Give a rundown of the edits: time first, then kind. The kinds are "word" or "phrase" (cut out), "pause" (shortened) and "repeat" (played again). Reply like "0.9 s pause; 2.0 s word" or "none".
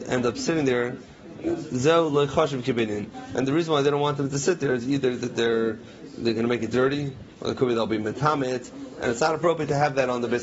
none